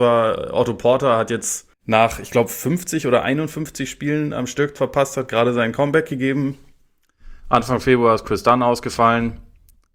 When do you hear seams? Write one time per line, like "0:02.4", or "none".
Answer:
0:01.7
0:04.8